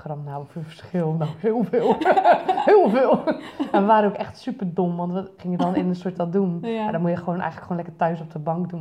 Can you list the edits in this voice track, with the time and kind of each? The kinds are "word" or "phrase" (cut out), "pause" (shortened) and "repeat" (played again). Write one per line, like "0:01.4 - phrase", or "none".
0:05.4 - word
0:06.1 - word